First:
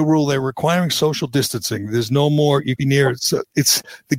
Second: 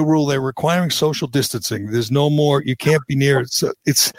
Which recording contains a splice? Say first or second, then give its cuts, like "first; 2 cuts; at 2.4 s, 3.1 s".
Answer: first; 1 cut; at 2.8 s